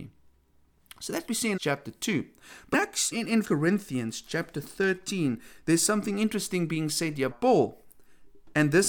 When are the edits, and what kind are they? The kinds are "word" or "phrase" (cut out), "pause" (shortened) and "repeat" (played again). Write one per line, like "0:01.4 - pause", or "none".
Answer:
0:01.3 - word
0:01.6 - word
0:02.7 - word
0:03.1 - word
0:03.4 - word
0:07.3 - word